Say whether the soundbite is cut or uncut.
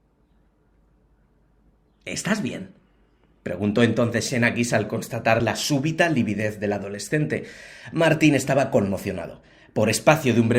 uncut